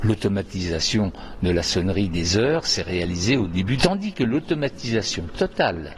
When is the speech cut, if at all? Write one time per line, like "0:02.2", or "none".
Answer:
0:03.8